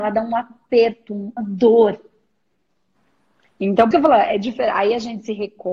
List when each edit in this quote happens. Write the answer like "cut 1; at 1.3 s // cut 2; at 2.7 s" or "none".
cut 1; at 1.4 s // cut 2; at 3.9 s